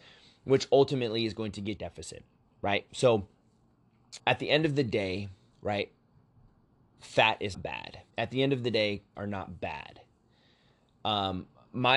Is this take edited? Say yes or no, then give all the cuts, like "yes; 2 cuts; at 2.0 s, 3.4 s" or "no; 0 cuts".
yes; 6 cuts; at 1.8 s, 4.2 s, 5.5 s, 7.5 s, 8.1 s, 9.1 s